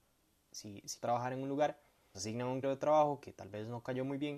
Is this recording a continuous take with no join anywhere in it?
no; 3 cuts; at 1.0 s, 2.1 s, 2.6 s

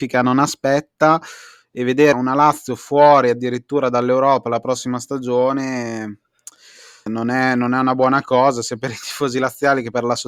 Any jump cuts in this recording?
yes; 2 cuts; at 2.1 s, 7.1 s

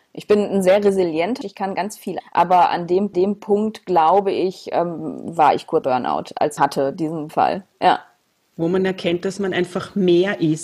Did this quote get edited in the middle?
yes; 6 cuts; at 1.4 s, 2.2 s, 3.1 s, 5.8 s, 6.6 s, 7.3 s

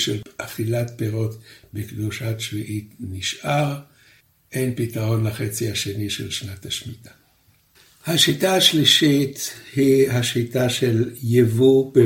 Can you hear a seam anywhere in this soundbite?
no; 0 cuts

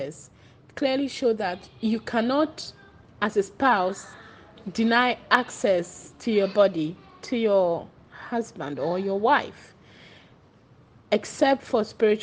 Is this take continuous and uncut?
yes; 0 cuts

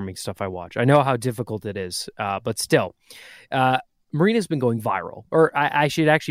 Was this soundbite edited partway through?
no; 0 cuts

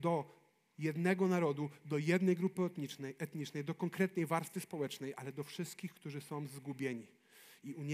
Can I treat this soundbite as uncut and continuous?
yes; 0 cuts

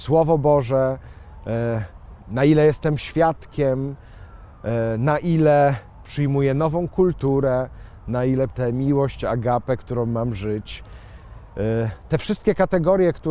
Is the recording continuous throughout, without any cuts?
no; 1 cut; at 8.5 s

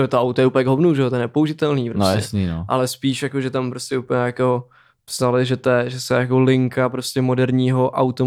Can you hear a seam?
no; 0 cuts

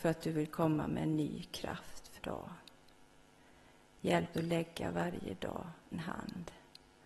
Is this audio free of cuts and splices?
no; 3 cuts; at 2.2 s, 4.3 s, 5.9 s

